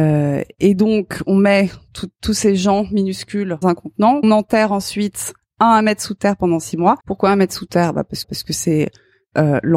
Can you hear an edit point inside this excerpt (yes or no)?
yes